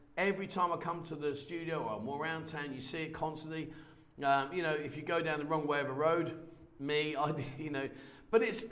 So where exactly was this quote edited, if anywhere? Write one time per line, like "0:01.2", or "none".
none